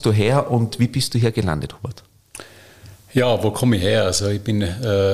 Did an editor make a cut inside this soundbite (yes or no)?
no